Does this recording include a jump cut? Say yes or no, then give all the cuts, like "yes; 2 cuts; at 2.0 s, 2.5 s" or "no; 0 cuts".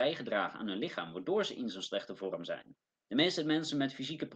yes; 1 cut; at 2.9 s